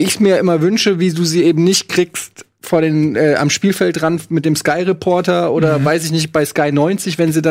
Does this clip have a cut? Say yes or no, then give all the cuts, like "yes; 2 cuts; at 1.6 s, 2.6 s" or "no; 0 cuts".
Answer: no; 0 cuts